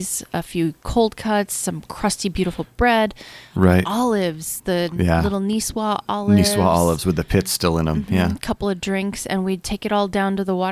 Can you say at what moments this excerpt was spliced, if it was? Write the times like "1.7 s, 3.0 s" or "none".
9.6 s

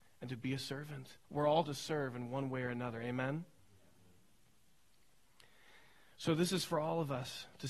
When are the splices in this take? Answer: 1.2 s, 1.6 s

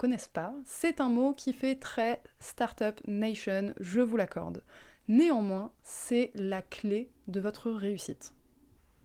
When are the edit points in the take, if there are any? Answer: none

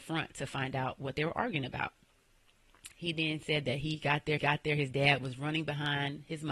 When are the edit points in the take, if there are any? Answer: 4.4 s

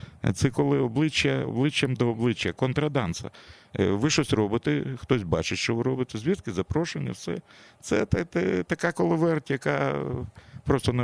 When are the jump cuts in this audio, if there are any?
none

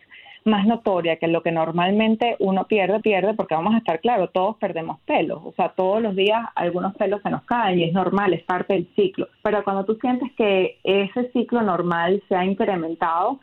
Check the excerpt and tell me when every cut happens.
3.0 s, 9.3 s

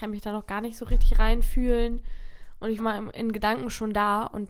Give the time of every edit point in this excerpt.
2.8 s

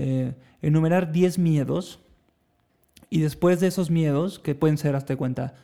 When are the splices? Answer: none

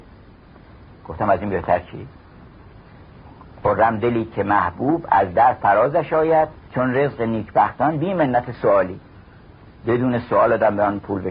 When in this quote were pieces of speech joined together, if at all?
6.7 s

